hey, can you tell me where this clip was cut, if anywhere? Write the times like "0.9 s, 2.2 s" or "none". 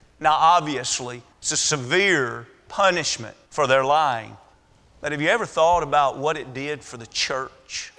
1.3 s, 3.4 s, 4.5 s

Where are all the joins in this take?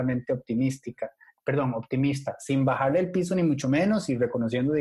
none

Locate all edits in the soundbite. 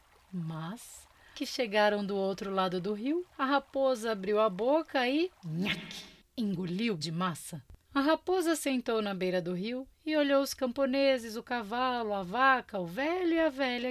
1.3 s, 3.3 s, 5.4 s, 7.0 s, 7.8 s

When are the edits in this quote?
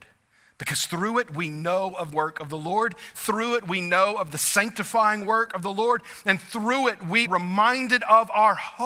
2.1 s, 7.3 s

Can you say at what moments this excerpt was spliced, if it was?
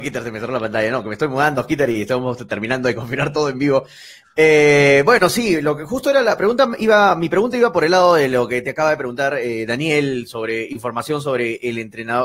none

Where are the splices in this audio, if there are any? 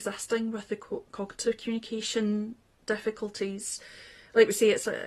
none

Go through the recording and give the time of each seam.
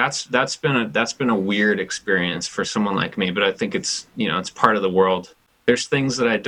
none

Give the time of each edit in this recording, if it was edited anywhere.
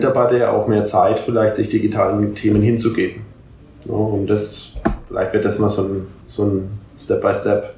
6.2 s

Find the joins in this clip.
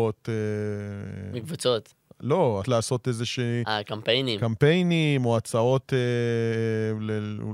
2.6 s

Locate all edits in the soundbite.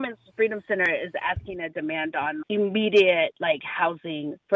2.4 s

